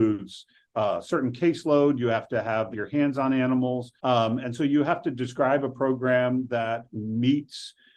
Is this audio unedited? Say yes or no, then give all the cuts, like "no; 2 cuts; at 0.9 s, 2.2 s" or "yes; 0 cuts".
no; 2 cuts; at 2.7 s, 4.0 s